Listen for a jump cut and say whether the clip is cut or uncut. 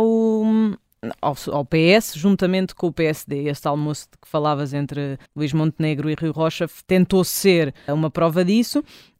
cut